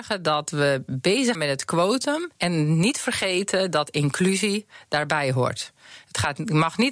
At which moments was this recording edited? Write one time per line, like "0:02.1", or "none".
0:01.3
0:02.3